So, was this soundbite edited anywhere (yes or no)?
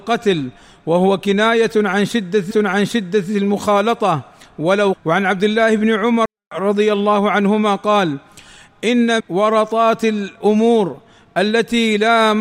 yes